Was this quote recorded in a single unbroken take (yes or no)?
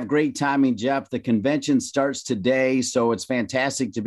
yes